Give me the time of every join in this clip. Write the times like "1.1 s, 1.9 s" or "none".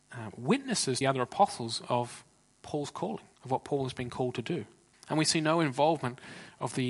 1.0 s, 3.3 s, 4.9 s